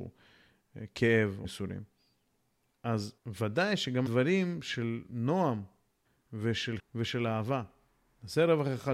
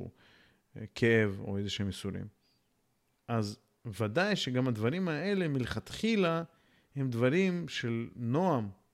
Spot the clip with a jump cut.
first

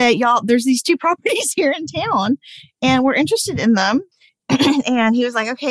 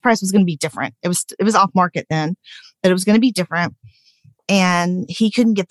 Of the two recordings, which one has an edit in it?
first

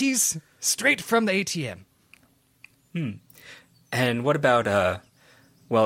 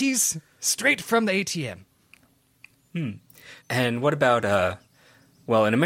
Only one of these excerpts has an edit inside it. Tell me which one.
second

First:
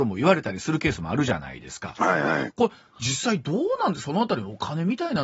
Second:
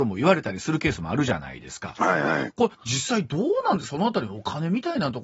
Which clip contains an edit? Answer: second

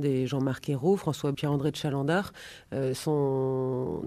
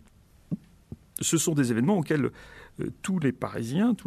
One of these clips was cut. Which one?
first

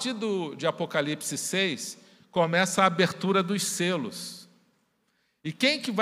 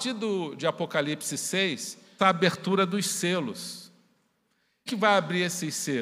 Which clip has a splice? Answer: second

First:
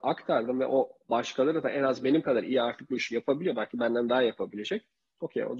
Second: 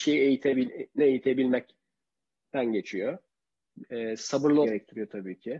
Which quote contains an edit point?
second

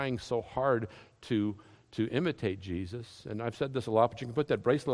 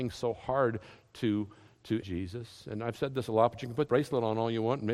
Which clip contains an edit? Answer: second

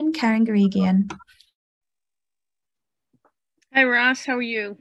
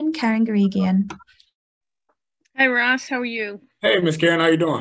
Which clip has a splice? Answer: second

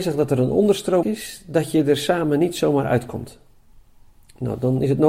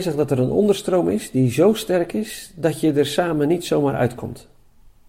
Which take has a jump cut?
first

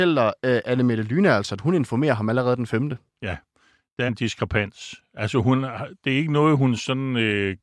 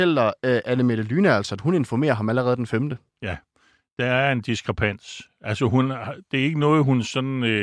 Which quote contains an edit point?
first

